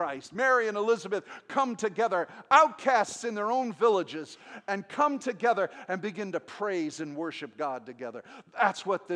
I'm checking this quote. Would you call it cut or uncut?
uncut